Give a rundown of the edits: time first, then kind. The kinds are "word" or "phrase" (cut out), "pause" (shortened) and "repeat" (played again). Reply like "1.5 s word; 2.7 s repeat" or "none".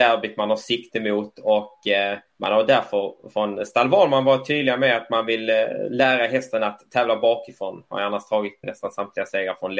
2.3 s pause; 8.6 s word